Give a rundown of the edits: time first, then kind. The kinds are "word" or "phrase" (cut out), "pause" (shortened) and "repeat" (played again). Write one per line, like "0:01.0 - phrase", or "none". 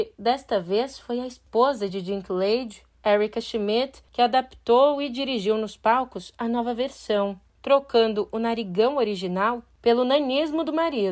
none